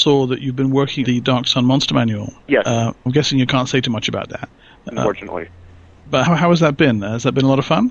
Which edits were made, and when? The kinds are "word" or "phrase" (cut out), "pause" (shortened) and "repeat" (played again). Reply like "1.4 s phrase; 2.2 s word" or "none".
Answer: 1.0 s word; 2.4 s pause; 3.1 s word; 5.0 s word; 6.3 s word